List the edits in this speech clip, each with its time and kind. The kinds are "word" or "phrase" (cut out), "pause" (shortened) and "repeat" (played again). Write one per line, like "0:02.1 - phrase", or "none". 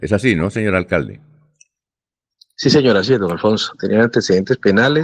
none